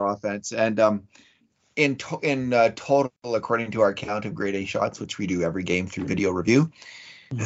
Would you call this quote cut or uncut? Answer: uncut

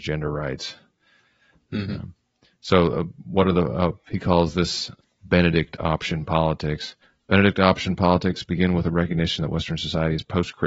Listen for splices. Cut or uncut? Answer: uncut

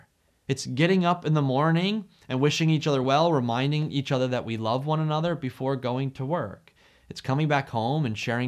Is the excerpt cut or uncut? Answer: uncut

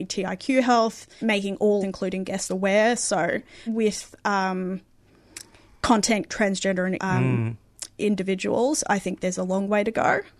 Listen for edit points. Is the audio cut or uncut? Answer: cut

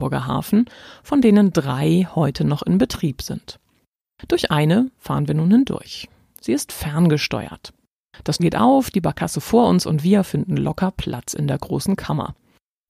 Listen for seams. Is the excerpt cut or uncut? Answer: cut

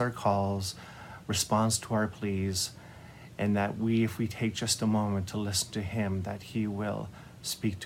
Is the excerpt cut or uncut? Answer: uncut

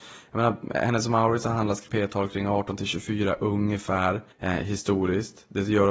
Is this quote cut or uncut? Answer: cut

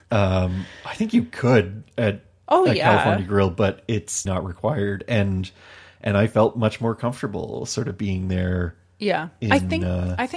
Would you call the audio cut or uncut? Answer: cut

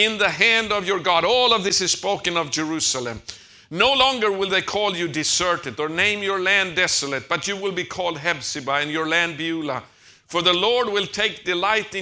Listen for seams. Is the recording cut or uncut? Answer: uncut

